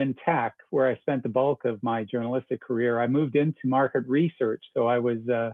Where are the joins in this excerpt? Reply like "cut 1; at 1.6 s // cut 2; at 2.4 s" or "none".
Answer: none